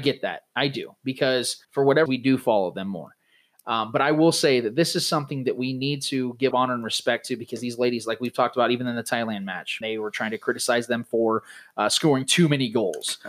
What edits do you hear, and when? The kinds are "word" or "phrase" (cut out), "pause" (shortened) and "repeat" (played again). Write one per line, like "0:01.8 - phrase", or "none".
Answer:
0:01.6 - pause
0:02.1 - word
0:06.5 - phrase
0:09.8 - word

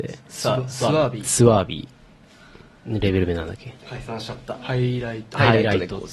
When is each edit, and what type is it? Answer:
0:03.8 - pause

